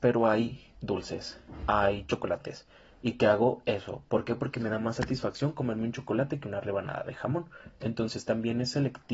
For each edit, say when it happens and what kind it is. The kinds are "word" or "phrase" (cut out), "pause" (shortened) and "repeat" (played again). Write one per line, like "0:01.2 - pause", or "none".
none

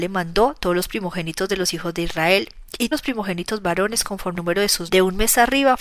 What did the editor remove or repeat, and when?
0:02.9 - word
0:04.4 - word
0:04.9 - word

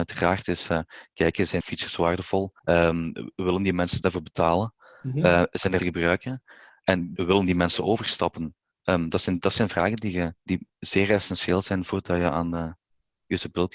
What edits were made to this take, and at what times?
0:01.6 - word
0:02.6 - pause
0:04.0 - phrase
0:05.8 - phrase
0:07.2 - word
0:10.4 - pause

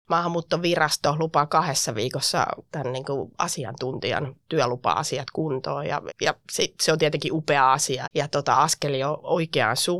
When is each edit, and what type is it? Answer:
0:02.7 - word
0:06.1 - word
0:08.0 - word

